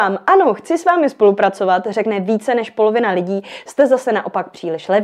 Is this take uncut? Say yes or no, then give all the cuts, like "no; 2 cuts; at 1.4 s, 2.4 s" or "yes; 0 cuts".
yes; 0 cuts